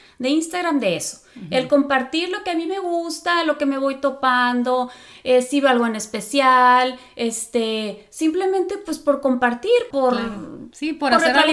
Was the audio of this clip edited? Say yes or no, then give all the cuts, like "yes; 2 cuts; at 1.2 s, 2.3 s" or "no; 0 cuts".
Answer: yes; 1 cut; at 9.9 s